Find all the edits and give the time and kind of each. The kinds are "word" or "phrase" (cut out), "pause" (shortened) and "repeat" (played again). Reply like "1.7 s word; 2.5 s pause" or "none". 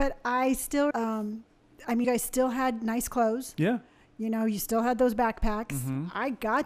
0.9 s word; 2.0 s word